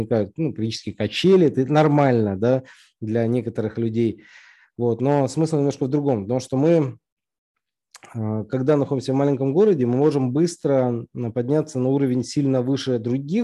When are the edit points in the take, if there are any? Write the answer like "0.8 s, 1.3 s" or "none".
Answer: none